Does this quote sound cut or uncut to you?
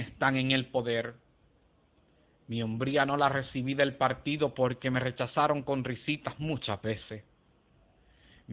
uncut